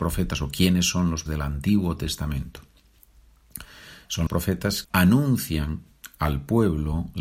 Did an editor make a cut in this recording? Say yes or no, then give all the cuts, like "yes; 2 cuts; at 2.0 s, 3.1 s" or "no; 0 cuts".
yes; 3 cuts; at 1.3 s, 4.3 s, 4.8 s